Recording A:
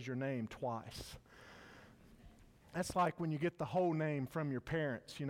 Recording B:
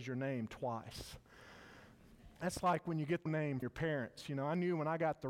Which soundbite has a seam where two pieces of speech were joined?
B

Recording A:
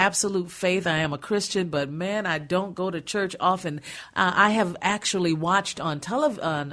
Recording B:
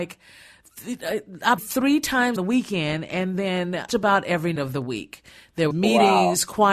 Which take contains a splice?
B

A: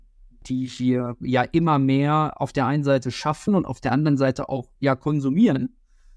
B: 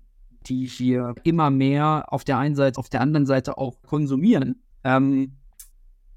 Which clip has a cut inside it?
B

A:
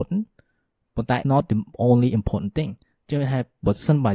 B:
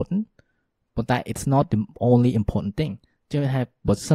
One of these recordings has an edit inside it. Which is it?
A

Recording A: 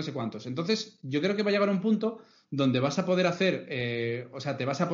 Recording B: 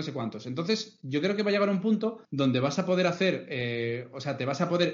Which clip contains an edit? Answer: B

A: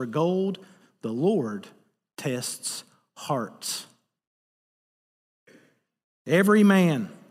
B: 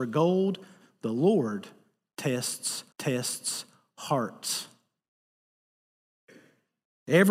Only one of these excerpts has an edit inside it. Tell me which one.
B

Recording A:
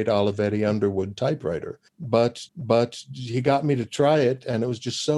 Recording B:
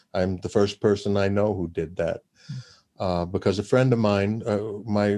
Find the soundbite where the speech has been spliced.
A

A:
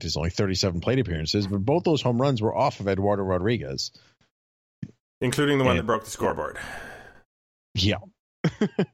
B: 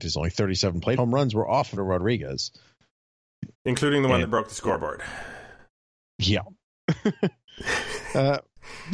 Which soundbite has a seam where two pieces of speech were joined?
B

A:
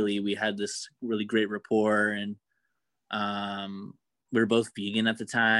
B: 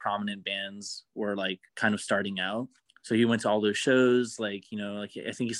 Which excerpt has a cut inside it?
B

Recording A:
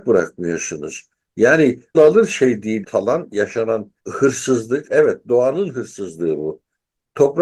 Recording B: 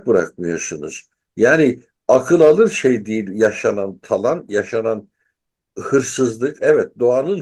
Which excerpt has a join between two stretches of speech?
A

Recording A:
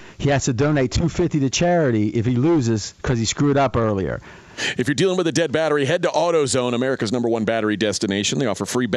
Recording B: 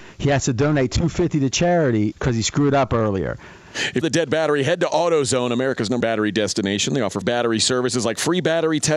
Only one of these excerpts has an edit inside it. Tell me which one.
B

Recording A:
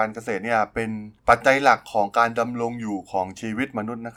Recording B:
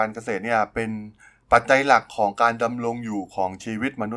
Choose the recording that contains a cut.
A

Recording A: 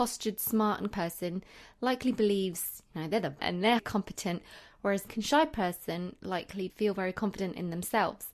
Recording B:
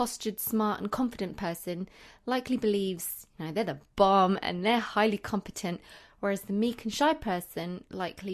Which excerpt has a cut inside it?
A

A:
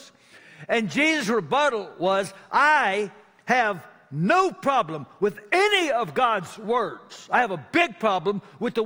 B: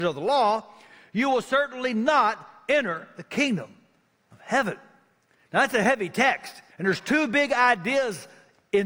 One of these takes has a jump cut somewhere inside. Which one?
B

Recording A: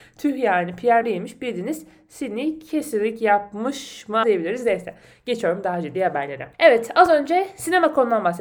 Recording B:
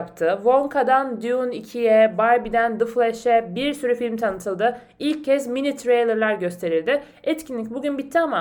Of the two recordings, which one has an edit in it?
A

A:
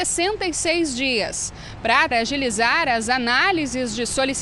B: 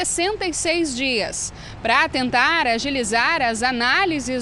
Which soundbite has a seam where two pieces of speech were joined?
A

